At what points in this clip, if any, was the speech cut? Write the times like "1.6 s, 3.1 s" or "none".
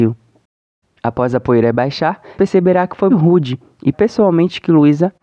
2.4 s, 3.1 s, 3.9 s